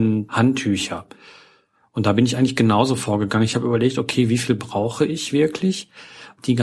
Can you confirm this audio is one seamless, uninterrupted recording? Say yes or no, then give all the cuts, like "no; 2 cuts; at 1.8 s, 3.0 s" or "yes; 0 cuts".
yes; 0 cuts